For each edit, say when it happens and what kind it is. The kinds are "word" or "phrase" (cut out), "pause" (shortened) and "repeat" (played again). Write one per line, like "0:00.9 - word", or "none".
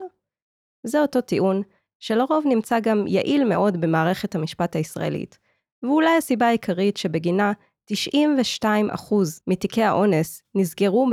0:09.4 - pause